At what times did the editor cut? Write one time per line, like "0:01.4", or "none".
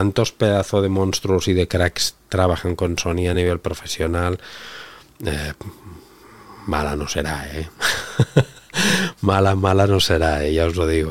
none